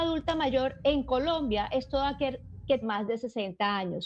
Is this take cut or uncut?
cut